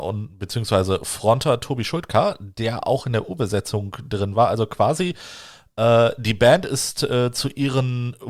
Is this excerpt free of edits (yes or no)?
yes